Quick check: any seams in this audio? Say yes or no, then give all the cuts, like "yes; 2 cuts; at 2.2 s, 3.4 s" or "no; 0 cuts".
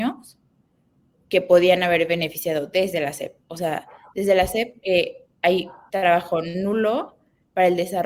yes; 1 cut; at 4.8 s